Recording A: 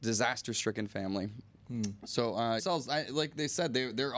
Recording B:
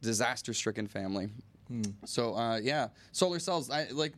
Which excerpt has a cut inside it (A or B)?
A